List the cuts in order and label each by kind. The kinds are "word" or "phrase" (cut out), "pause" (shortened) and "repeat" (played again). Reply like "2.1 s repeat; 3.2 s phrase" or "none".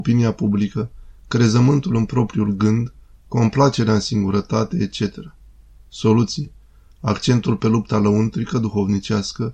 none